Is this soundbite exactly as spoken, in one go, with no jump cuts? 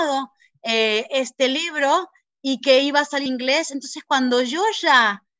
no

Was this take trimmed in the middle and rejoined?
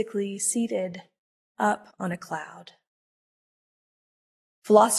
yes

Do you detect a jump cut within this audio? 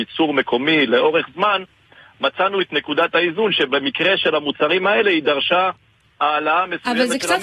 no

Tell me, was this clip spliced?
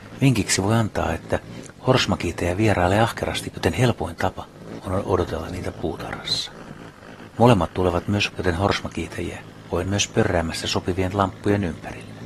yes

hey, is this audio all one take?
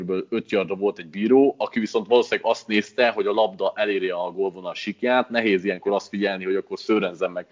yes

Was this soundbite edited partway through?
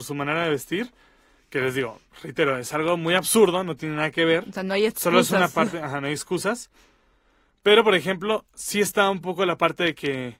no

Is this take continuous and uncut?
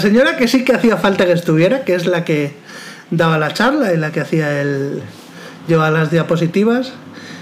yes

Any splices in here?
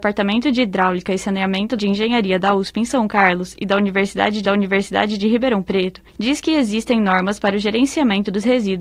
yes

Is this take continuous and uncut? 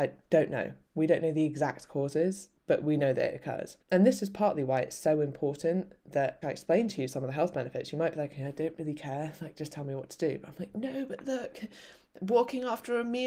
no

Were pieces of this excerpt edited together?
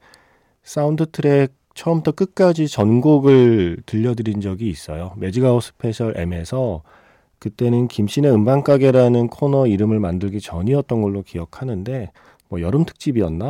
no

